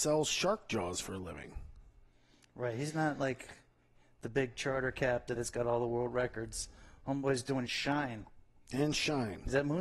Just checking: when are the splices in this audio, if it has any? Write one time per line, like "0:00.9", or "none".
0:05.4
0:07.7

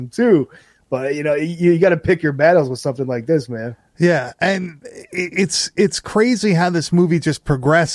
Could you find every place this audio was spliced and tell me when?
none

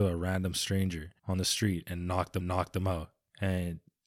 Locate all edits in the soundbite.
0:01.2
0:02.4

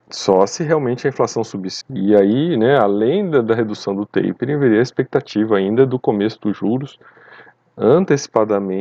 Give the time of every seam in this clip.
0:01.8

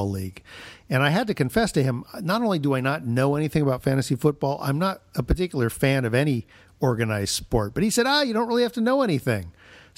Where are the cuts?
none

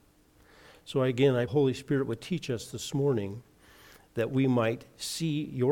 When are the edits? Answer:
0:01.5

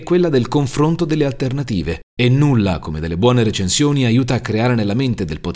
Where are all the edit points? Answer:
0:02.1

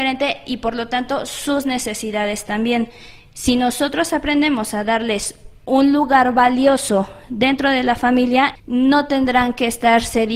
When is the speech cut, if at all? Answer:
0:08.6

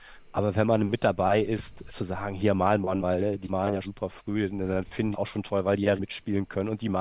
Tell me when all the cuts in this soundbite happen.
0:01.9
0:03.0
0:03.5
0:03.8
0:05.1
0:06.0

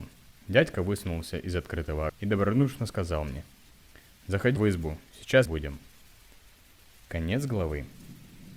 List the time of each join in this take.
0:02.1
0:04.6
0:05.4

